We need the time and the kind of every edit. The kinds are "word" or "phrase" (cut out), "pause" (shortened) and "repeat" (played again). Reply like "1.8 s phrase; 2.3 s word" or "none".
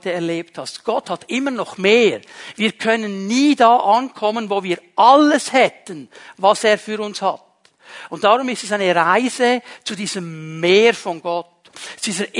none

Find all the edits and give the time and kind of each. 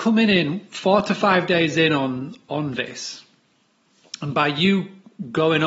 none

